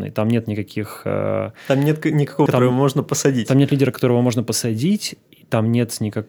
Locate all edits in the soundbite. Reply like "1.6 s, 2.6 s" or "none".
2.5 s